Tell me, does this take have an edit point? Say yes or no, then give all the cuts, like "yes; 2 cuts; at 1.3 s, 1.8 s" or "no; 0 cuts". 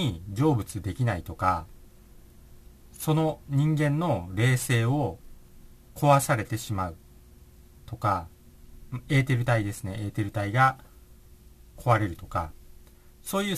no; 0 cuts